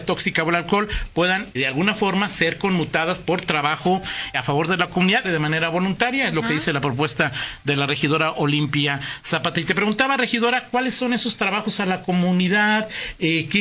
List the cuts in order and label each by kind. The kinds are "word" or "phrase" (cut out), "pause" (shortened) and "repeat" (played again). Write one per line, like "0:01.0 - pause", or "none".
0:01.5 - word
0:04.3 - word
0:05.2 - word